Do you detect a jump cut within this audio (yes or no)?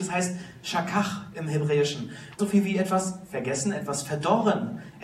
yes